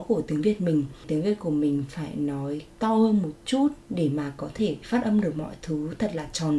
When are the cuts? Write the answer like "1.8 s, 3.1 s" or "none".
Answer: 2.7 s